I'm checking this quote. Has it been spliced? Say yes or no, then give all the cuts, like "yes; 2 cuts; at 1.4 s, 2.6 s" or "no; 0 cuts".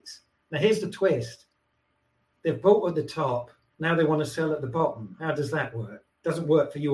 no; 0 cuts